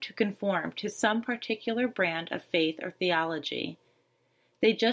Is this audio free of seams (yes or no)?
yes